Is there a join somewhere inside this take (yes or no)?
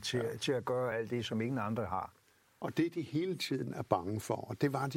no